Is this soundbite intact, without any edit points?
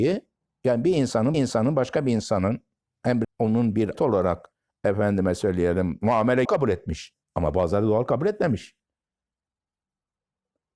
no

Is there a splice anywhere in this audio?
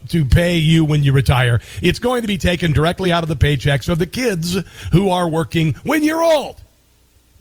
no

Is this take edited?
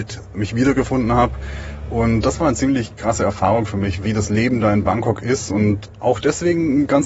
no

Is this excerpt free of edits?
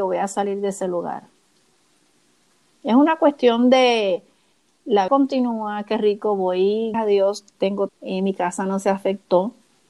no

